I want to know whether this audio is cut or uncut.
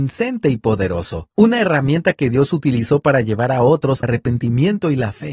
cut